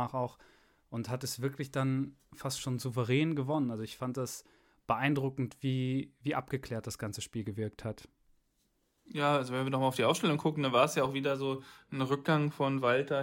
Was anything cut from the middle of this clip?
no; 0 cuts

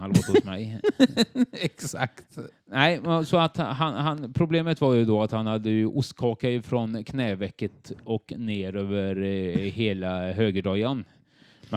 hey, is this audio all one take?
yes; 0 cuts

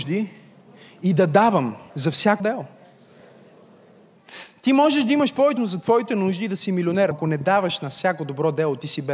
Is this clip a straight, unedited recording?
no; 4 cuts; at 1.9 s, 2.4 s, 5.6 s, 7.1 s

